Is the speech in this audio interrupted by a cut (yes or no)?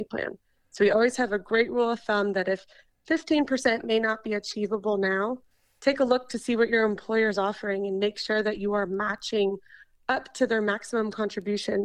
no